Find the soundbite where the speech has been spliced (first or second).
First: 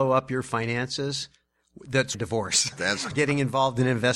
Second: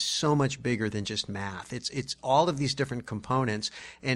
first